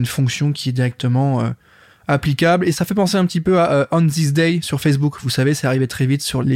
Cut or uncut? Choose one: uncut